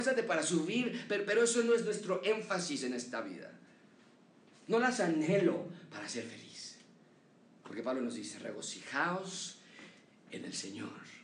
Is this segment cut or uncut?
uncut